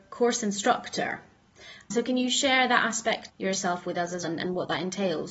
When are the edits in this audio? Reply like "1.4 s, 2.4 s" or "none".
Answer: 1.9 s, 3.3 s, 4.2 s